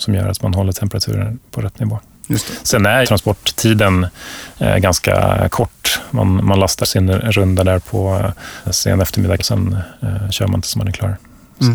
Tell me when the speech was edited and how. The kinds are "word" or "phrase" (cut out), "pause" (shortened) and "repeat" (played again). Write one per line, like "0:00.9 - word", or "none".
0:03.0 - phrase
0:06.8 - word
0:08.6 - word
0:09.4 - word